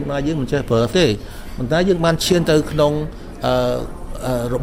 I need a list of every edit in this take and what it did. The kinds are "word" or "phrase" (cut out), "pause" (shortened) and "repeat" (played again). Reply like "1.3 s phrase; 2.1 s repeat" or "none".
0.9 s word